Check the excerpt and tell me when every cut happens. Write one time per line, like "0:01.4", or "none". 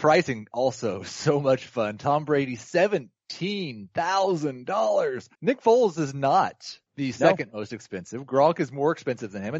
0:05.3
0:06.9